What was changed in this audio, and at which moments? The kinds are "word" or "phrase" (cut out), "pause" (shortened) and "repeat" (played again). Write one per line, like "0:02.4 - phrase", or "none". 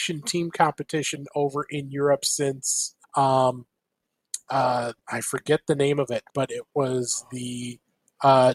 0:03.0 - pause
0:05.0 - pause
0:06.3 - pause